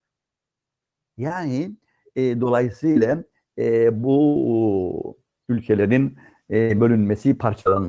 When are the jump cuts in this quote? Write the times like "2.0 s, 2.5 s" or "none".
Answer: none

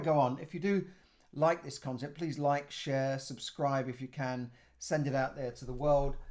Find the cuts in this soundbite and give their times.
none

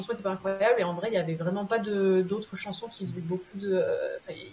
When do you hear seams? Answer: none

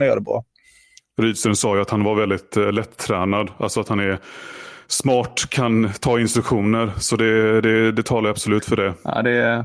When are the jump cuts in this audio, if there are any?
none

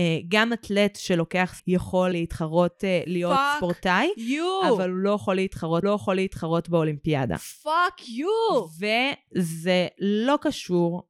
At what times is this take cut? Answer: 1.6 s, 2.1 s, 5.8 s

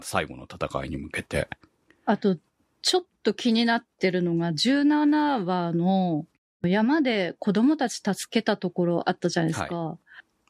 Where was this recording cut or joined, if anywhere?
1.8 s, 6.5 s

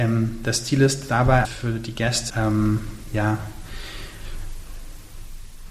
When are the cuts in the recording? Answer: 1.4 s, 2.3 s

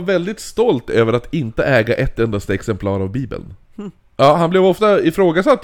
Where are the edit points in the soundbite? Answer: 3.6 s

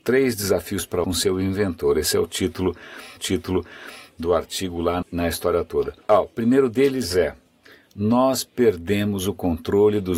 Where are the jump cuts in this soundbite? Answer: 1.0 s, 3.2 s, 5.0 s, 6.0 s

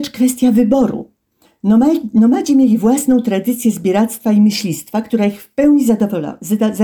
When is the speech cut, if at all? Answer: none

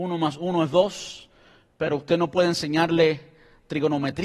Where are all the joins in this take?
none

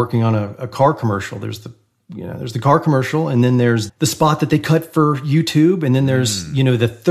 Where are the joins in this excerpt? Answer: 3.9 s

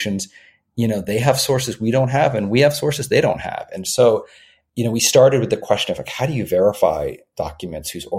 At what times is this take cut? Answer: none

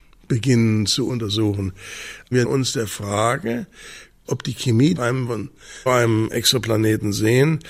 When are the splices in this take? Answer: 2.4 s, 4.9 s, 5.9 s

